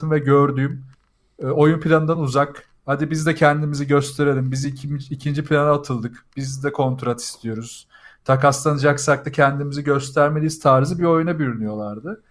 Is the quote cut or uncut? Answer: uncut